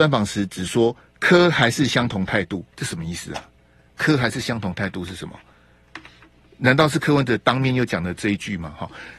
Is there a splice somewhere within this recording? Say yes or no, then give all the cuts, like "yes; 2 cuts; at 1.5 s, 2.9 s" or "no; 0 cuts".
yes; 1 cut; at 2.7 s